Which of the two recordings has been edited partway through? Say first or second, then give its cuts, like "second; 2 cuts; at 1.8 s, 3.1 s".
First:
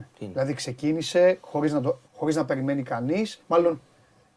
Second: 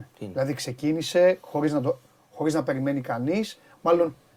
first; 2 cuts; at 2.1 s, 3.4 s